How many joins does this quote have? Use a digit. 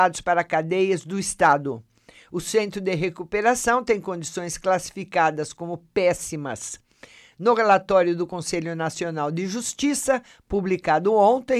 0